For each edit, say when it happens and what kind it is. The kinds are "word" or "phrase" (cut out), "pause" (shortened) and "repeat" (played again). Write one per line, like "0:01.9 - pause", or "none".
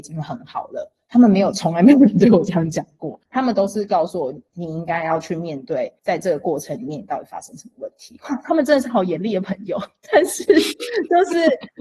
0:03.3 - pause
0:06.0 - pause